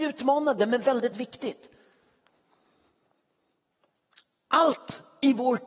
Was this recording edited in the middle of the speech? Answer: yes; 1 cut; at 1.1 s

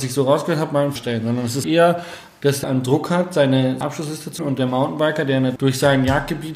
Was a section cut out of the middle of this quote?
yes; 6 cuts; at 1.0 s, 1.6 s, 2.6 s, 3.8 s, 4.4 s, 5.6 s

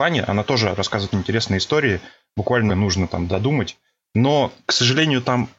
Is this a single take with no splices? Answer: no; 3 cuts; at 1.1 s, 2.7 s, 4.6 s

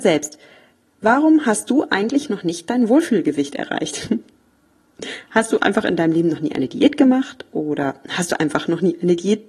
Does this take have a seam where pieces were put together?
no; 0 cuts

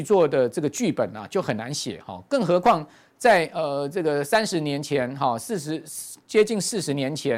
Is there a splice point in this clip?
no; 0 cuts

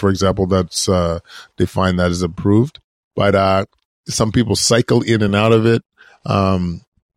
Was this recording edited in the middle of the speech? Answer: no; 0 cuts

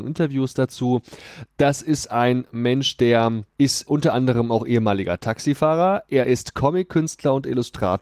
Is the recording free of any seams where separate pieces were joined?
yes; 0 cuts

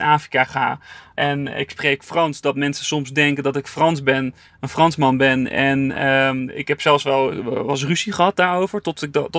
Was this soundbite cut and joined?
no; 0 cuts

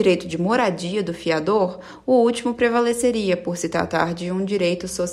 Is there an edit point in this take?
no; 0 cuts

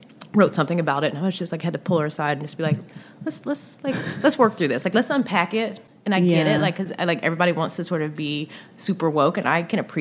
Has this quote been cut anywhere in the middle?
no; 0 cuts

